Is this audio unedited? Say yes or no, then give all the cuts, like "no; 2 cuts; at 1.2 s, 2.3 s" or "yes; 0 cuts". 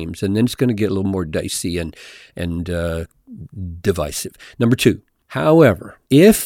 yes; 0 cuts